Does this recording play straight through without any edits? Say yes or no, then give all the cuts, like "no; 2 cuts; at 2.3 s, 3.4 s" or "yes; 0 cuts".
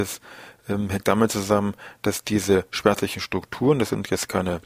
yes; 0 cuts